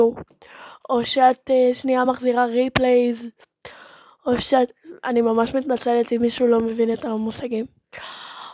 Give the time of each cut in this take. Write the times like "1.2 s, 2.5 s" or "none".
none